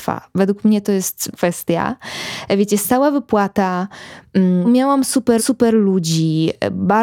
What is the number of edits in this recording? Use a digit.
3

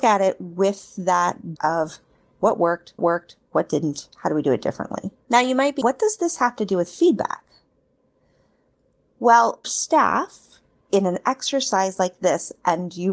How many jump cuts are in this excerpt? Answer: 6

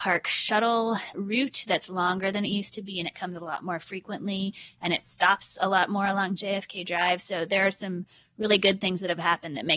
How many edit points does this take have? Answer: 1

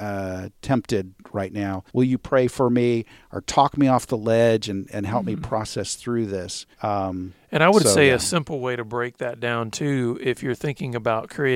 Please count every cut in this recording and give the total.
2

